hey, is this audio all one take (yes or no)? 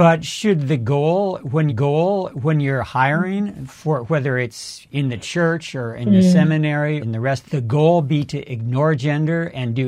no